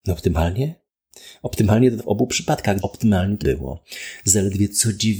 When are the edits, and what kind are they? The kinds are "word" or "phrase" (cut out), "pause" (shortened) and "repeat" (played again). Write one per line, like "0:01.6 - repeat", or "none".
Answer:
0:02.0 - phrase
0:02.8 - word
0:03.4 - word

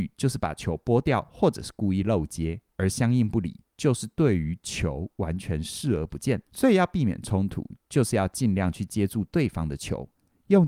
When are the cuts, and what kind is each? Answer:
0:02.7 - pause
0:06.5 - pause

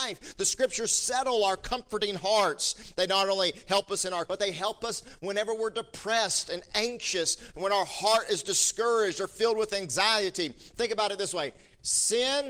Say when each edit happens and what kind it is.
0:04.3 - word

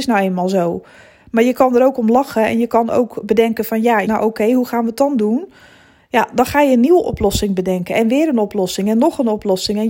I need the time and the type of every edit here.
0:04.1 - word

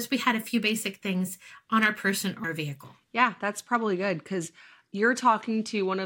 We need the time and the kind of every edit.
0:02.4 - word

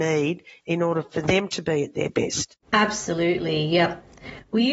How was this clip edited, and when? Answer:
0:02.6 - pause

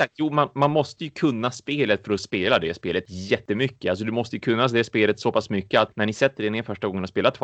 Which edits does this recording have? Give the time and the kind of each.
none

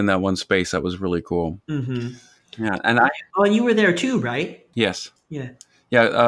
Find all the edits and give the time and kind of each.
0:01.6 - pause

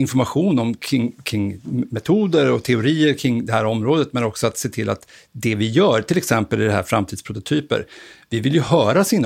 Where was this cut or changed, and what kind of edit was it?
none

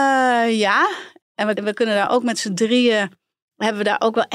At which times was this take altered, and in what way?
0:01.6 - word

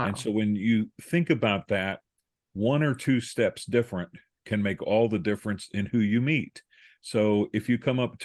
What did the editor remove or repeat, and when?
none

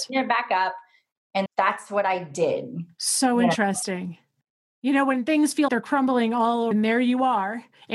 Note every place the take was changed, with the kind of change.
0:01.5 - word
0:05.7 - word
0:06.7 - word

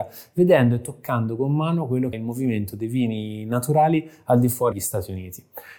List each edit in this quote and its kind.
0:02.1 - word
0:04.7 - word

